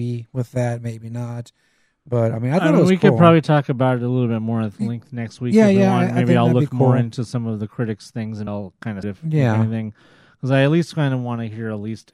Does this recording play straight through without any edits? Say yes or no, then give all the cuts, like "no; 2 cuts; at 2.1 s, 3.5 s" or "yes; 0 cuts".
no; 2 cuts; at 8.5 s, 9.0 s